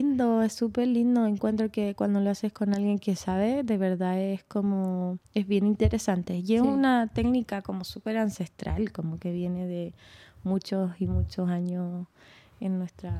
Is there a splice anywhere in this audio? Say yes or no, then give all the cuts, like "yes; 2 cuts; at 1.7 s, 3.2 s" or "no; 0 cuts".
no; 0 cuts